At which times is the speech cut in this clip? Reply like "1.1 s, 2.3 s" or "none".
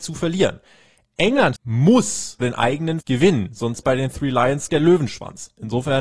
1.6 s, 2.4 s, 3.0 s, 3.8 s, 4.7 s